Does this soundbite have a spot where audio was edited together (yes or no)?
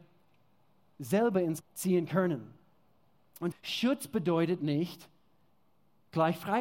yes